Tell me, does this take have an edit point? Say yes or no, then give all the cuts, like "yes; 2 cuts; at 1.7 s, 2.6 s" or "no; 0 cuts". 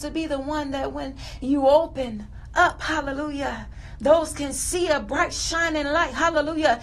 no; 0 cuts